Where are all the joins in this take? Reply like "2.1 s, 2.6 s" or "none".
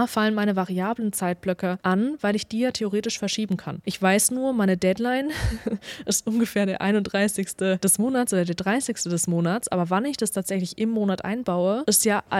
none